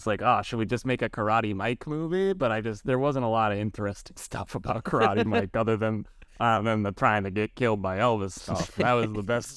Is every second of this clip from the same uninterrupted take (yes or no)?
yes